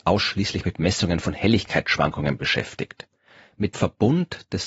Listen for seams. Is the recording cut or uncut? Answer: cut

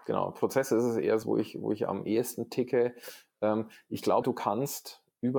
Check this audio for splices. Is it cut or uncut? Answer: cut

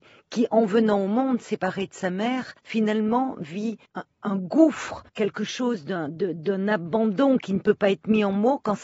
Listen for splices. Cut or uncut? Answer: cut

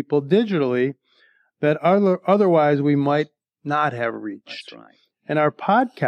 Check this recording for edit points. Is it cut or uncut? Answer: uncut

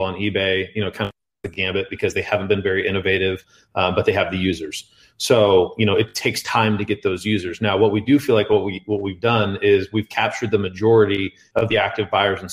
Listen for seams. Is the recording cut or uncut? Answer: uncut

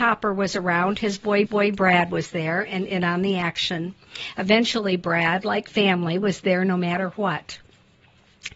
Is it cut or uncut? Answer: cut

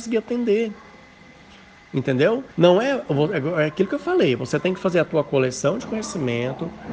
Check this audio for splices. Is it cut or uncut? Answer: cut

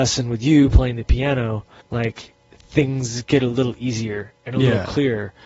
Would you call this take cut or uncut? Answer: cut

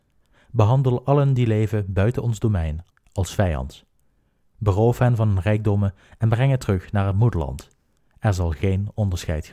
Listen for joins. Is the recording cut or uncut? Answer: cut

